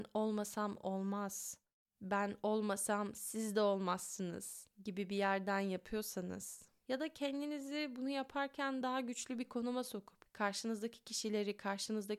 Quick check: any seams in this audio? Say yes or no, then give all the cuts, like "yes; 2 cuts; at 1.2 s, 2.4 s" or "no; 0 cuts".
no; 0 cuts